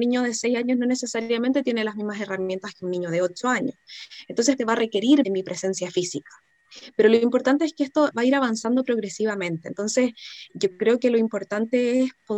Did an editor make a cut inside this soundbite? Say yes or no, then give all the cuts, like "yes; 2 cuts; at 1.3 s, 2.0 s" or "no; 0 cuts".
yes; 4 cuts; at 4.6 s, 5.2 s, 8.1 s, 10.5 s